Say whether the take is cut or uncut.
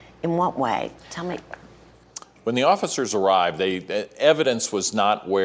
cut